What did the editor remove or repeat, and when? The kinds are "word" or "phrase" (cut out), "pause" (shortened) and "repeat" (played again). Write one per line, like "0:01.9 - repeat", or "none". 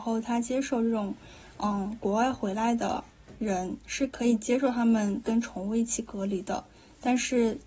none